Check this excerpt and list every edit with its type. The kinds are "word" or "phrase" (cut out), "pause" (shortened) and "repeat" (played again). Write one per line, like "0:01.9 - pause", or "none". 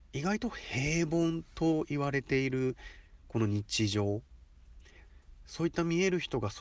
none